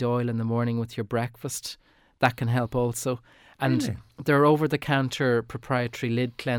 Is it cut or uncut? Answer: uncut